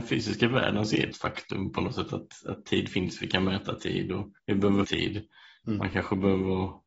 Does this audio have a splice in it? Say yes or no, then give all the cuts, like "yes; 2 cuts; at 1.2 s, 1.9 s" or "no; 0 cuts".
yes; 3 cuts; at 1.1 s, 4.4 s, 4.8 s